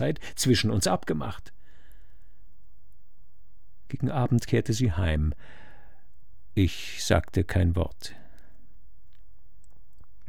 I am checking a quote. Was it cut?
no; 0 cuts

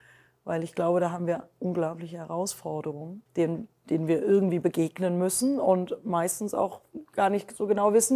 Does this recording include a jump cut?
yes; 1 cut; at 3.3 s

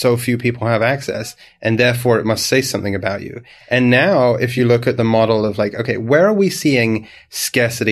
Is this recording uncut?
yes; 0 cuts

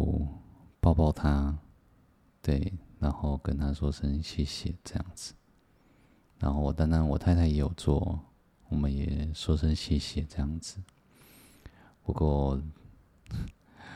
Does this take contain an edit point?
no; 0 cuts

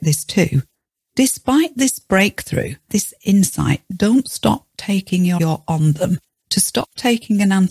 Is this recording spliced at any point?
yes; 2 cuts; at 2.9 s, 5.4 s

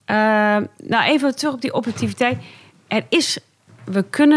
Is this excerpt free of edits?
yes; 0 cuts

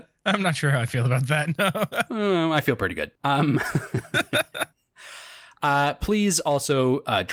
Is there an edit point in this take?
yes; 1 cut; at 3.1 s

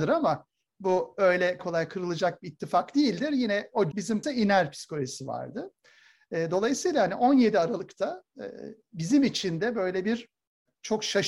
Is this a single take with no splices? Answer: no; 3 cuts; at 1.6 s, 3.9 s, 4.2 s

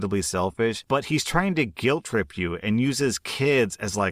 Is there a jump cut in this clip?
no; 0 cuts

